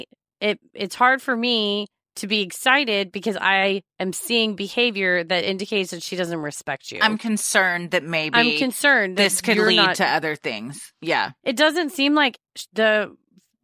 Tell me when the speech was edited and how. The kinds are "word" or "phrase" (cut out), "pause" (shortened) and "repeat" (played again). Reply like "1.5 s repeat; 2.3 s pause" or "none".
none